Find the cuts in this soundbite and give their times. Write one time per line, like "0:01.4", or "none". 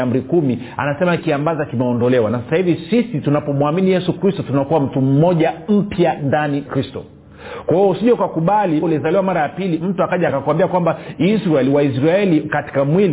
0:01.2
0:06.7
0:08.8
0:10.3